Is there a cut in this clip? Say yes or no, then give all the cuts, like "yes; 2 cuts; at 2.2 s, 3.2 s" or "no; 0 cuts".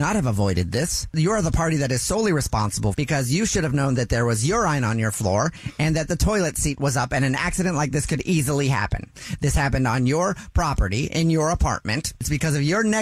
no; 0 cuts